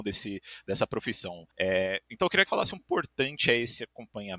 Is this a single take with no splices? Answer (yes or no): no